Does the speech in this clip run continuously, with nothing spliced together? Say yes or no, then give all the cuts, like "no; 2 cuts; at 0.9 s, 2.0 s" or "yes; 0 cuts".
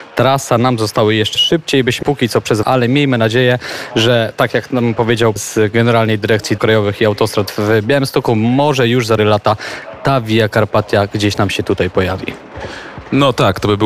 no; 6 cuts; at 1.4 s, 2.0 s, 2.6 s, 5.4 s, 6.6 s, 9.2 s